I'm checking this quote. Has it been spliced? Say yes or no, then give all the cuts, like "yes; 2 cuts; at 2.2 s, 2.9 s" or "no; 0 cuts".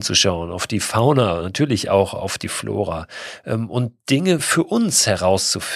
no; 0 cuts